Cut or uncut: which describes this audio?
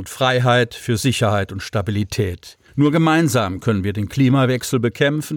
cut